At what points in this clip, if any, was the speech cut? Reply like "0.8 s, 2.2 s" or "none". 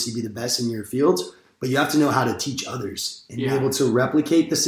none